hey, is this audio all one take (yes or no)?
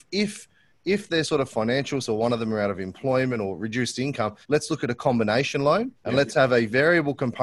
no